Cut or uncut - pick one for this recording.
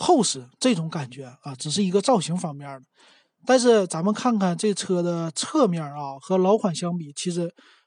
uncut